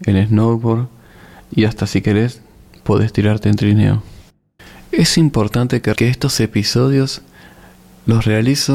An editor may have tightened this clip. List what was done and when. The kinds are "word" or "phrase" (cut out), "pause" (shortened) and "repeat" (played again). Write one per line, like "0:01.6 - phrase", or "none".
0:06.0 - word